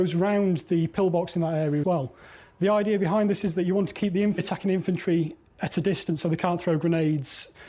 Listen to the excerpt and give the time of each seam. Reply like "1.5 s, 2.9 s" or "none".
1.8 s, 4.4 s